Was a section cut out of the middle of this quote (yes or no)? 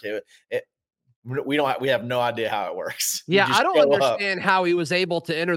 no